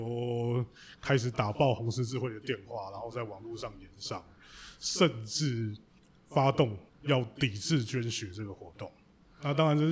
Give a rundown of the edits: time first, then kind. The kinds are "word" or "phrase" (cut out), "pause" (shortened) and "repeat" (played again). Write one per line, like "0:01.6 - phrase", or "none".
0:06.0 - pause
0:06.9 - pause